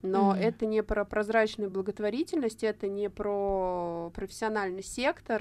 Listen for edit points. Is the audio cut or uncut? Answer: uncut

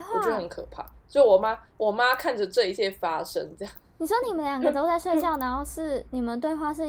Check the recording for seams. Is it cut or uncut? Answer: uncut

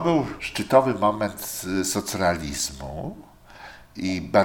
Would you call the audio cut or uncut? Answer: uncut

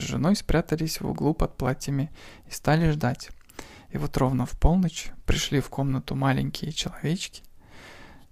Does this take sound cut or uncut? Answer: uncut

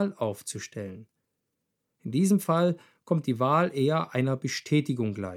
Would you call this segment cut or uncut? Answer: uncut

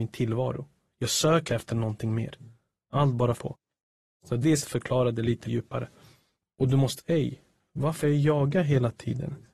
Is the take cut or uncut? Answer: cut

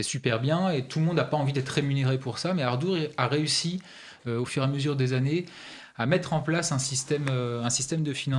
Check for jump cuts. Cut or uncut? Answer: uncut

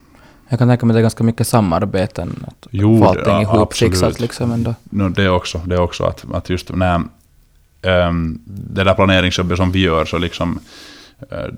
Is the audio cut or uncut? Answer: uncut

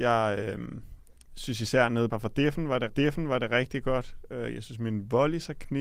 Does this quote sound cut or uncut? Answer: cut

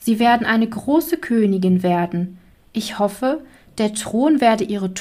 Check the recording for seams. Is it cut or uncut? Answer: uncut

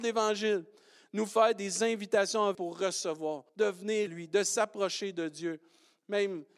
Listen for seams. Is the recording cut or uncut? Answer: cut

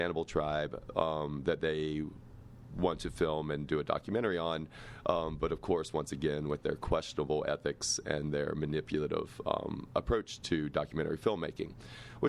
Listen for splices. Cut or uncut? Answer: uncut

